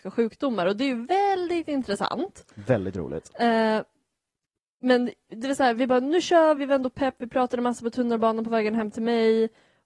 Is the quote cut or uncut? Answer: cut